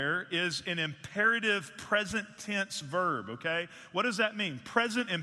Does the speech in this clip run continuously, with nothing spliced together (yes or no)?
yes